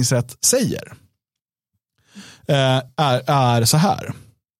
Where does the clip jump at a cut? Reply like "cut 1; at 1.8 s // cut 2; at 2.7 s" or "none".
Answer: none